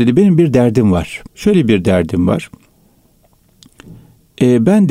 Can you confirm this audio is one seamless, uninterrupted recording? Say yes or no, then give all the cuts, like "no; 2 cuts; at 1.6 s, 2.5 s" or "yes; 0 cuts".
no; 1 cut; at 1.3 s